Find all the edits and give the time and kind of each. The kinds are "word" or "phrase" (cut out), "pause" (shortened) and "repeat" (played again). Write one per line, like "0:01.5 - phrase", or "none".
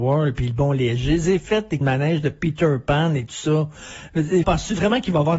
0:01.8 - word
0:04.4 - word